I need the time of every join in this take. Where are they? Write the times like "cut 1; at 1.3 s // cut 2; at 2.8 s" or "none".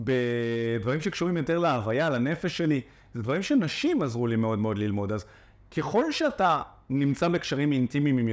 none